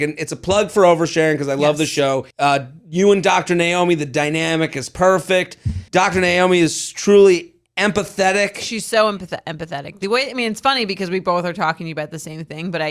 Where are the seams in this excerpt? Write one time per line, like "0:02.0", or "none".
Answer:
0:02.3
0:05.9